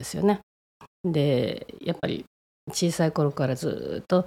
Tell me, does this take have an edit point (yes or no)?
no